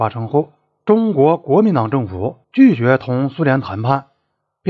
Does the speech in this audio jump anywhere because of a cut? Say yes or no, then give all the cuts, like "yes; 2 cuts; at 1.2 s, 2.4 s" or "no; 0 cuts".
yes; 1 cut; at 2.4 s